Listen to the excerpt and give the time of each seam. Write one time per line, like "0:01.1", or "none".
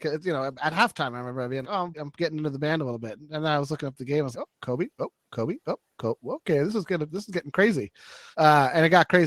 0:01.6
0:01.9
0:04.3
0:08.3